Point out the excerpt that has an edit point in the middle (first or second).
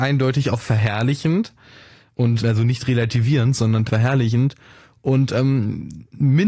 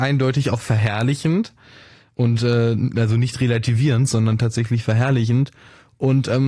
first